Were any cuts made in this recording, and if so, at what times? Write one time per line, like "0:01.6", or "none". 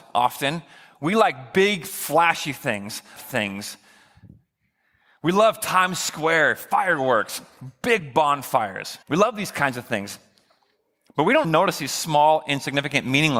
0:03.2
0:09.0
0:11.4